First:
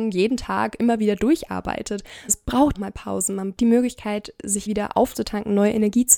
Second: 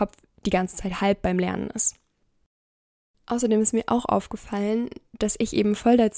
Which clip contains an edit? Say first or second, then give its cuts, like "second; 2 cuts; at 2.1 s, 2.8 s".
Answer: first; 4 cuts; at 2.3 s, 2.7 s, 3.6 s, 4.7 s